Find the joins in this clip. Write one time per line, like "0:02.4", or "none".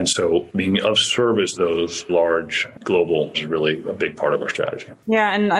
0:01.6
0:02.1
0:03.3